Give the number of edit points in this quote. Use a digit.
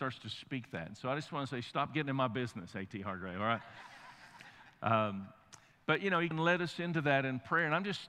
1